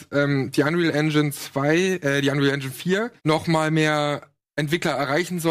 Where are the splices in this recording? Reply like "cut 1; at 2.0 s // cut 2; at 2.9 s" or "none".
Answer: cut 1; at 3.2 s